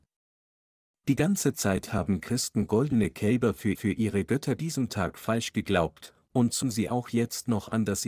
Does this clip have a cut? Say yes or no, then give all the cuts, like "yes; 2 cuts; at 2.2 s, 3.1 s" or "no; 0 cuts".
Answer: yes; 3 cuts; at 3.7 s, 4.6 s, 6.6 s